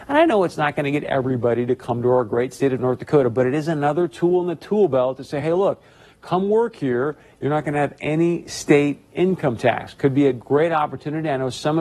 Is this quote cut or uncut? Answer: uncut